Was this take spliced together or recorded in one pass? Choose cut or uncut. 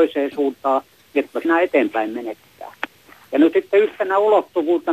cut